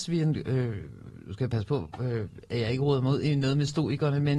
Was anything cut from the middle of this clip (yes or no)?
no